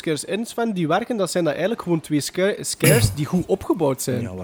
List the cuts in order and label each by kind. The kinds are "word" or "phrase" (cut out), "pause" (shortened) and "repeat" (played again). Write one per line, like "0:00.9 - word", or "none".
none